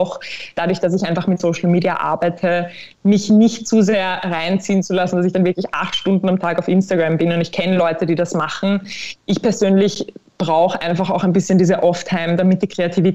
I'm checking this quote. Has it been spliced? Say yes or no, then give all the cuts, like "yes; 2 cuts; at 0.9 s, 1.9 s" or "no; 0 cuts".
no; 0 cuts